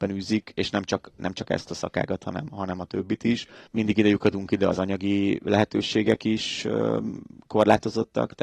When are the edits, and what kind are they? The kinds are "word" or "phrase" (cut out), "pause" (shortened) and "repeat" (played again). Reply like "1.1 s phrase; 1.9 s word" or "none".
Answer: none